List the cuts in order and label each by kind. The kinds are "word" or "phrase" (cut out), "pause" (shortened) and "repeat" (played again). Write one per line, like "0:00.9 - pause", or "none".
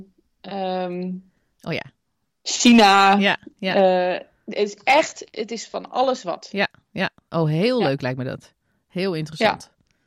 none